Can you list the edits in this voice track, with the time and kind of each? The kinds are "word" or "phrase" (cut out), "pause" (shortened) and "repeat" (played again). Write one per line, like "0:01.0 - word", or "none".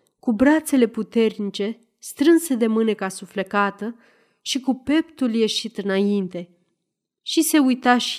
none